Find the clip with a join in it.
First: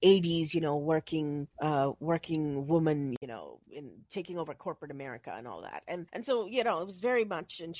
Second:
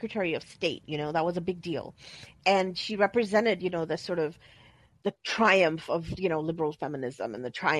first; 2 cuts; at 1.5 s, 6.1 s

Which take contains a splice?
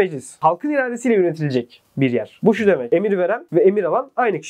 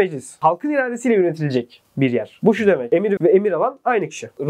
second; 1 cut; at 3.2 s

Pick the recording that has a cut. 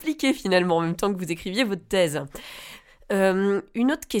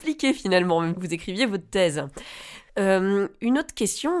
second; 2 cuts; at 1.0 s, 2.7 s

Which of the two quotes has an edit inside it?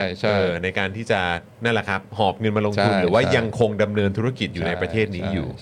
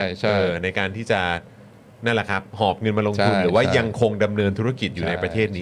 first; 1 cut; at 1.4 s

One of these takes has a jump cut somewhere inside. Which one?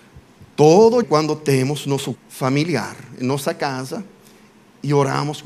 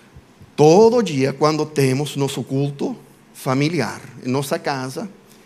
first; 2 cuts; at 1.0 s, 2.1 s

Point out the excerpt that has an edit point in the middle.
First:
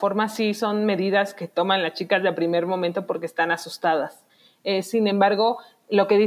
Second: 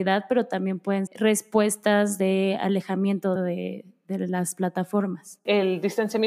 second; 2 cuts; at 1.1 s, 3.4 s

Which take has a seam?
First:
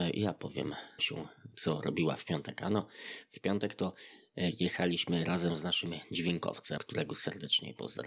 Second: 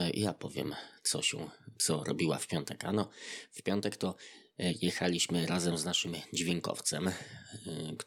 first; 2 cuts; at 1.0 s, 6.8 s

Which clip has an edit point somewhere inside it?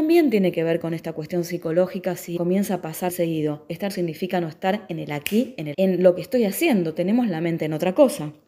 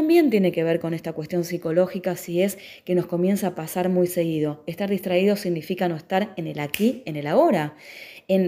first; 4 cuts; at 2.4 s, 3.1 s, 3.9 s, 5.7 s

